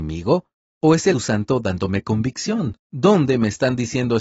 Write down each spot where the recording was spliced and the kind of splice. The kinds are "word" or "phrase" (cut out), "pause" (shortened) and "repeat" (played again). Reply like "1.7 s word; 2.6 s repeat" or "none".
1.1 s word; 2.8 s pause